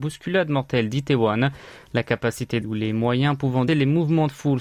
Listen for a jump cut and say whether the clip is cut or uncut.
cut